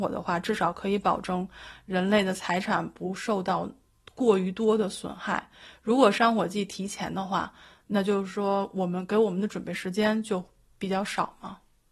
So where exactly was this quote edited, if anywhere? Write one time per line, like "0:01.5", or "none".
none